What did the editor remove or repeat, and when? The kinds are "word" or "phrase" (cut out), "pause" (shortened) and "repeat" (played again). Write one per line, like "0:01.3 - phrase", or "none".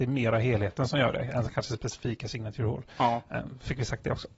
none